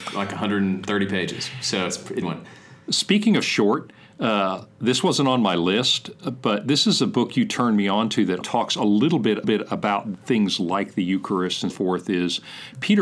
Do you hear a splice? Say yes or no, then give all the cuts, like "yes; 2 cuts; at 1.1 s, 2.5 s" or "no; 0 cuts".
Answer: yes; 4 cuts; at 2.2 s, 8.4 s, 9.4 s, 11.7 s